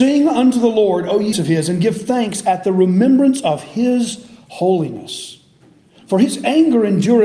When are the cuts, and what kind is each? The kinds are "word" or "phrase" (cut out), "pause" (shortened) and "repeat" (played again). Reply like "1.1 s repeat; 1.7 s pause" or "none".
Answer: 1.3 s word